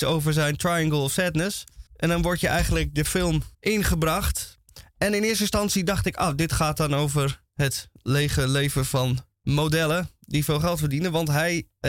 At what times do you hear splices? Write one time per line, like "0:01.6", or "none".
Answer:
0:01.9
0:03.5
0:07.5
0:09.3